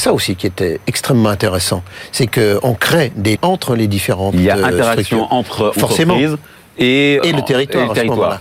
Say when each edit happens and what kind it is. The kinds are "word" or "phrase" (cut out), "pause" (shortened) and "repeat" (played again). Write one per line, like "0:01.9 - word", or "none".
0:03.4 - word
0:07.2 - word